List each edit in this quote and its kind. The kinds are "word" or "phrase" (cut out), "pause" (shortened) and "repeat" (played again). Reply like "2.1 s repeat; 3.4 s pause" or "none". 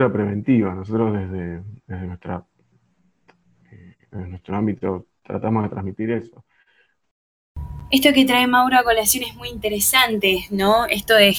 none